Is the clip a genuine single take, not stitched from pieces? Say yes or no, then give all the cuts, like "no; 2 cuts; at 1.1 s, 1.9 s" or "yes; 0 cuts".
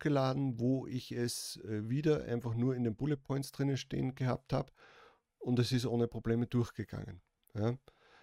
yes; 0 cuts